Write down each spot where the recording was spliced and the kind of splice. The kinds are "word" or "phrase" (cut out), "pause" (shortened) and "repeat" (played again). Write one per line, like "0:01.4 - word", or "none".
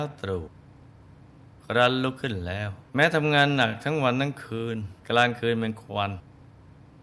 0:02.9 - pause
0:05.0 - pause